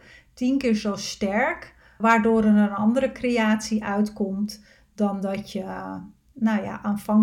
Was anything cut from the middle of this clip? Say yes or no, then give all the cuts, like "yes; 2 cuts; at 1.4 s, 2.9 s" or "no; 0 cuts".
yes; 1 cut; at 2.0 s